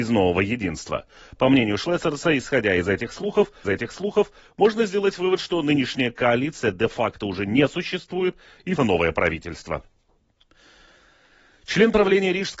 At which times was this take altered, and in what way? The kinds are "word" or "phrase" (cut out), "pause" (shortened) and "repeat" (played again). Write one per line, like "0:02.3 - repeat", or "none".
0:03.6 - repeat
0:08.8 - word